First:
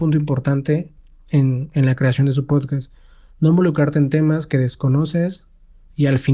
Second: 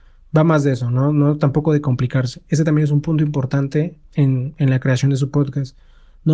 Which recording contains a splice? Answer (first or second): second